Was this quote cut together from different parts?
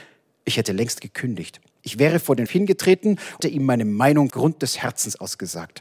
yes; 3 cuts; at 2.5 s, 3.4 s, 4.3 s

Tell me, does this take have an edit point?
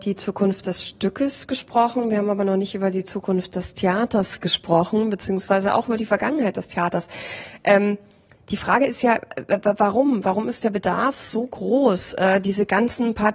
no; 0 cuts

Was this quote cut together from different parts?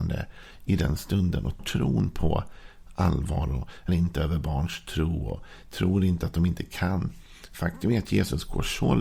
yes; 2 cuts; at 1.6 s, 3.9 s

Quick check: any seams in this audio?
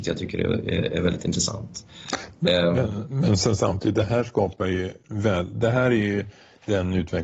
no; 0 cuts

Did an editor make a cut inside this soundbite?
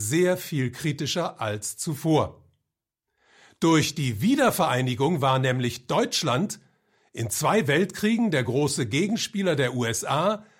no; 0 cuts

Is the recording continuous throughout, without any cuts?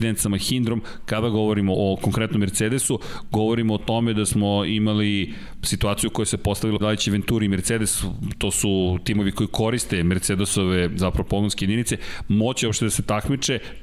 no; 2 cuts; at 1.7 s, 6.8 s

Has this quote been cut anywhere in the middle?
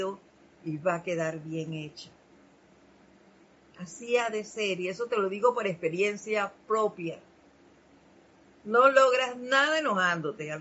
no; 0 cuts

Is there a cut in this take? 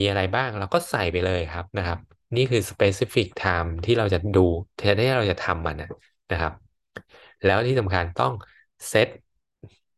yes; 1 cut; at 1.7 s

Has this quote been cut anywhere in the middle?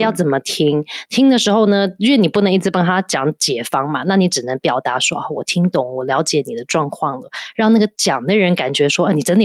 no; 0 cuts

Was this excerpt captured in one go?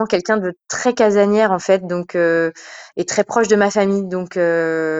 yes; 0 cuts

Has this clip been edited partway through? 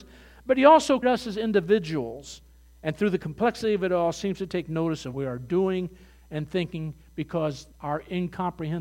yes; 3 cuts; at 1.0 s, 5.1 s, 7.7 s

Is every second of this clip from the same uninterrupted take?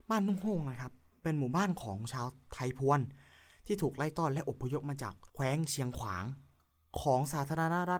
no; 1 cut; at 5.3 s

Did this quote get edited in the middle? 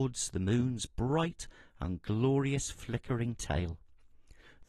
no; 0 cuts

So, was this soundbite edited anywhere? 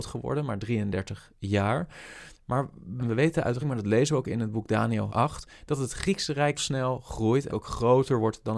yes; 5 cuts; at 3.0 s, 3.6 s, 5.1 s, 6.6 s, 7.5 s

